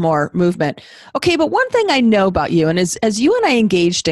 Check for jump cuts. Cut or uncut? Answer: uncut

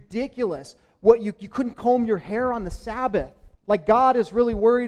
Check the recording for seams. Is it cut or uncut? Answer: cut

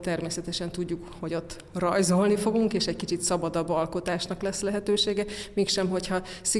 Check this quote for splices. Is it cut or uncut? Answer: uncut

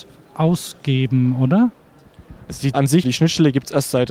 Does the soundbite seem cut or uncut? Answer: cut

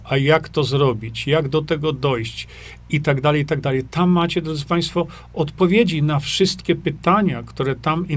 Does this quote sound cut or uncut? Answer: uncut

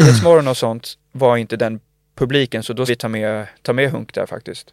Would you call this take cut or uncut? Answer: cut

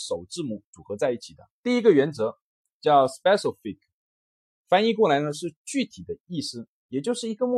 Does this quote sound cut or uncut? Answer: cut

